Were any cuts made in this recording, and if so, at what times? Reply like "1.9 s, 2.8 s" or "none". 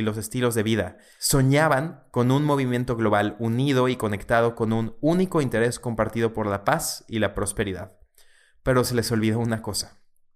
none